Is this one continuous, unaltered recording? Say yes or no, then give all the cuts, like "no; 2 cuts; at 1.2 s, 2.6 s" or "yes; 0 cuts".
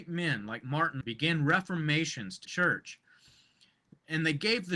no; 2 cuts; at 1.0 s, 2.4 s